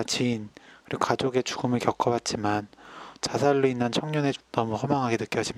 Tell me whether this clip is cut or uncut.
cut